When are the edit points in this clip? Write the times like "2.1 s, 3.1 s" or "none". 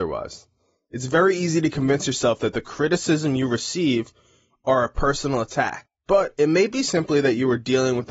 none